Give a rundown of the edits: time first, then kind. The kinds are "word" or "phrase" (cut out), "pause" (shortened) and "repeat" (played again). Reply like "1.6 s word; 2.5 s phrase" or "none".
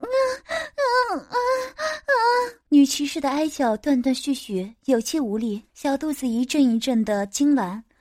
2.6 s pause; 5.7 s pause